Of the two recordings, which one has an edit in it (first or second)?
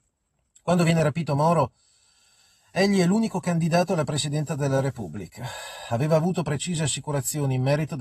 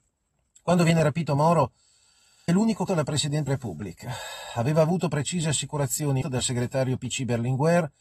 second